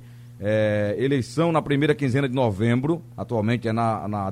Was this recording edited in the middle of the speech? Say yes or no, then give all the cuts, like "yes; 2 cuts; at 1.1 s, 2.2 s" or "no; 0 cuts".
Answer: no; 0 cuts